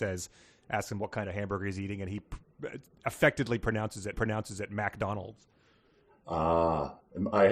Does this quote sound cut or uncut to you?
cut